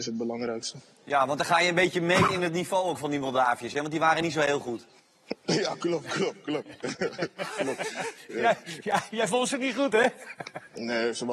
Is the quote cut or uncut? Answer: uncut